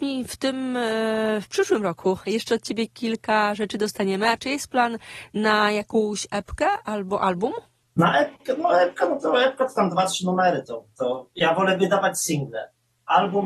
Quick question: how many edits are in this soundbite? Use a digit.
0